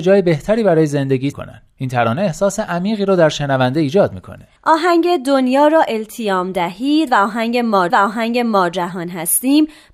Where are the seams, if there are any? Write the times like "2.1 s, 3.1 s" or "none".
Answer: 1.3 s, 4.6 s, 7.9 s